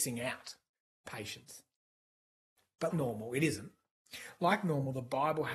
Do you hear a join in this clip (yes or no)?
yes